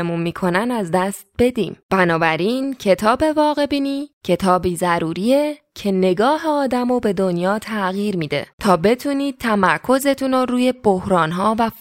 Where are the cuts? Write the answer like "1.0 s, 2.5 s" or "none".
1.8 s, 4.1 s, 8.5 s